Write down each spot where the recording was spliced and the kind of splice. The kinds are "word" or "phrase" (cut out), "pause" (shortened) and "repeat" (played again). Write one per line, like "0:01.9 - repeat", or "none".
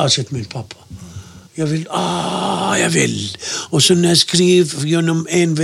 0:01.5 - pause